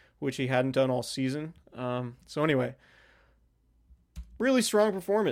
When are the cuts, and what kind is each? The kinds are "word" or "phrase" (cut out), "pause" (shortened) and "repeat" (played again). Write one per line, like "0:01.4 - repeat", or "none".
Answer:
none